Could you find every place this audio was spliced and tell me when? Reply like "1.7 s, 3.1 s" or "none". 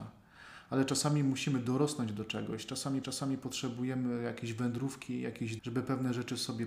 3.0 s, 5.6 s

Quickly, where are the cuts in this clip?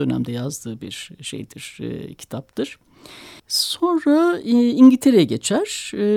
3.4 s

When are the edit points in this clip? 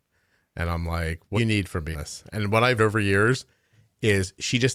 1.3 s, 1.9 s, 2.8 s

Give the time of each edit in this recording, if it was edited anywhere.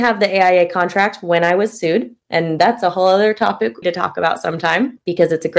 3.8 s

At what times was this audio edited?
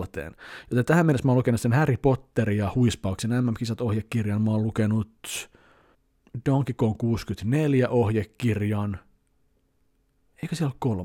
none

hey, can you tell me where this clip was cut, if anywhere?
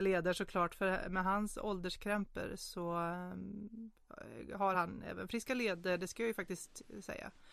none

